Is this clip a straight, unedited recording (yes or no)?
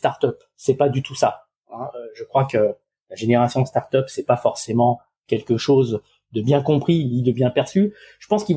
yes